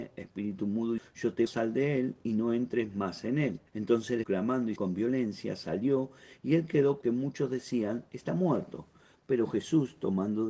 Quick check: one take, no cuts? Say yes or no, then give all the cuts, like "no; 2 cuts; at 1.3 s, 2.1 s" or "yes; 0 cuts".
no; 6 cuts; at 1.0 s, 1.5 s, 3.7 s, 4.2 s, 4.8 s, 7.0 s